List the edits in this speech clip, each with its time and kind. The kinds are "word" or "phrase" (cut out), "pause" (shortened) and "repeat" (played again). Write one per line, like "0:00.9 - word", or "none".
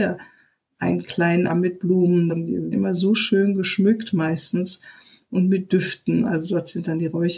0:01.5 - word
0:02.3 - word
0:02.7 - word